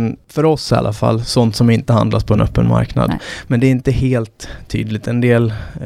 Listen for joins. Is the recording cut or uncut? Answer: uncut